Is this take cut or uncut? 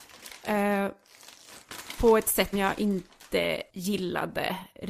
cut